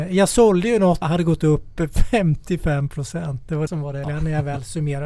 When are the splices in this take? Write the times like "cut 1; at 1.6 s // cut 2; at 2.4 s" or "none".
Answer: cut 1; at 1.0 s // cut 2; at 3.7 s // cut 3; at 4.0 s